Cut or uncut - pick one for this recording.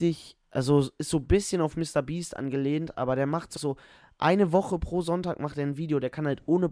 cut